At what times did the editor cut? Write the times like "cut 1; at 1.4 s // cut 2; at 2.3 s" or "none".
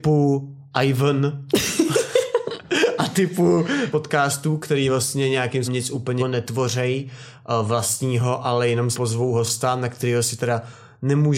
cut 1; at 3.9 s // cut 2; at 5.7 s // cut 3; at 6.2 s // cut 4; at 8.9 s